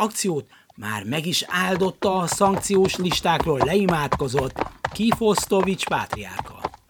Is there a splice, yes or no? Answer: no